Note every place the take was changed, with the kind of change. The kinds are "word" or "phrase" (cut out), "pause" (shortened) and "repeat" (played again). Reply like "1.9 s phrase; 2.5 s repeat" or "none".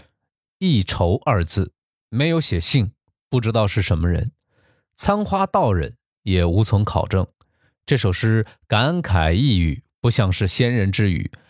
none